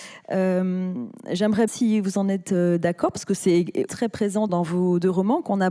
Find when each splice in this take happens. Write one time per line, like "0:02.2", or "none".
0:01.7
0:03.9
0:04.5